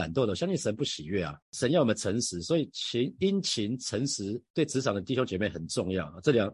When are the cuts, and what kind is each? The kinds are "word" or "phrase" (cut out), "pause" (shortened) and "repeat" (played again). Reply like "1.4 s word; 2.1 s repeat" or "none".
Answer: 1.4 s pause; 4.5 s pause